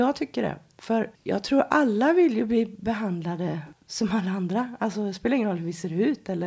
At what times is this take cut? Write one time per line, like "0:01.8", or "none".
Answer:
none